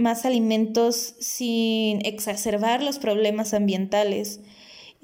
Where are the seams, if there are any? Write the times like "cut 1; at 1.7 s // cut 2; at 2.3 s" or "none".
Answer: none